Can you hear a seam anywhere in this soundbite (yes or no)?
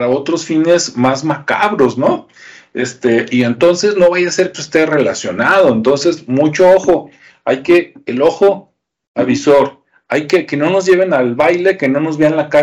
yes